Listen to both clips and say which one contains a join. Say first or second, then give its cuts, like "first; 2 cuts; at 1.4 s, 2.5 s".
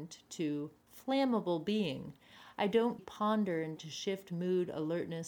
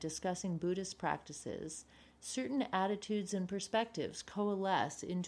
first; 2 cuts; at 3.0 s, 3.8 s